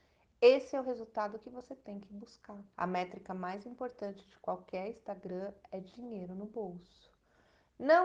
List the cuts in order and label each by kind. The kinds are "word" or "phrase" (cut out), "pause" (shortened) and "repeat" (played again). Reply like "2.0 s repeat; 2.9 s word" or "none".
2.7 s pause